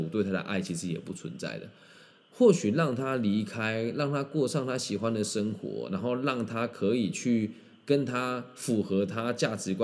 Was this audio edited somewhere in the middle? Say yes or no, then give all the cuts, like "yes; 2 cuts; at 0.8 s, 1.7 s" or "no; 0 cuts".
no; 0 cuts